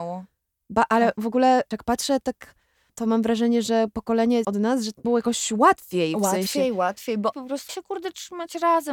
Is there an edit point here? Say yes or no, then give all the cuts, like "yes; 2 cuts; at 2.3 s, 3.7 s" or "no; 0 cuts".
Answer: yes; 6 cuts; at 1.7 s, 2.9 s, 4.4 s, 5.0 s, 7.3 s, 7.7 s